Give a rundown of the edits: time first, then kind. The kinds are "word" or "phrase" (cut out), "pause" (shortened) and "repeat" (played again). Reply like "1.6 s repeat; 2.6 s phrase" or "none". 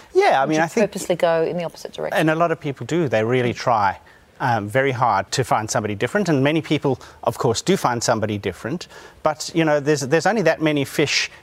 5.3 s word